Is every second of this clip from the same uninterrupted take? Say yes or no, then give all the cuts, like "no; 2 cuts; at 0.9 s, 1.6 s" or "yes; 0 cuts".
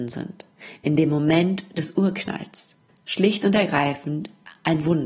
no; 1 cut; at 2.9 s